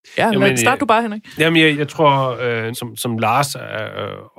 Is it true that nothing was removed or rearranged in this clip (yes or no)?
no